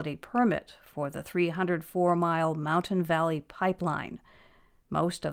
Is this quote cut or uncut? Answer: uncut